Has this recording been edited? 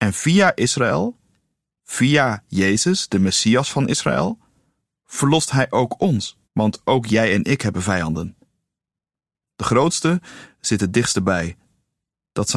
yes; 1 cut; at 6.4 s

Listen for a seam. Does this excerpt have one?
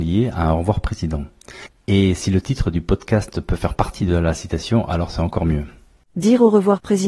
no; 0 cuts

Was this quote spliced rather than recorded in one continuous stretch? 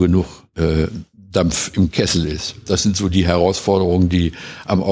no; 0 cuts

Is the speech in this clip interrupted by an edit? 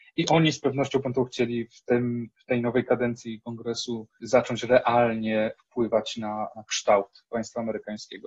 no; 0 cuts

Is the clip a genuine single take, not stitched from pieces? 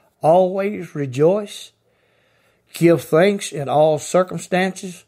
yes; 0 cuts

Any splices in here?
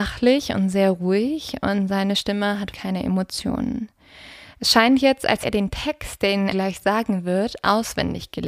yes; 3 cuts; at 2.7 s, 5.4 s, 6.5 s

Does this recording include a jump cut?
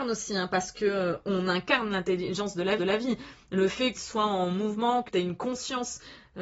yes; 3 cuts; at 2.8 s, 3.9 s, 5.1 s

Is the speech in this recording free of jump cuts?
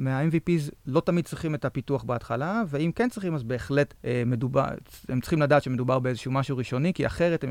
no; 1 cut; at 4.0 s

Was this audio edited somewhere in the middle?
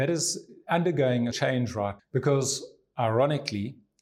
yes; 2 cuts; at 1.3 s, 2.0 s

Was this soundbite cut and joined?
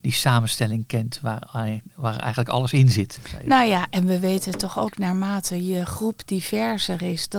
no; 0 cuts

